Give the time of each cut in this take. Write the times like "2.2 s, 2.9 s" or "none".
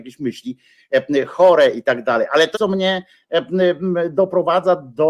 2.5 s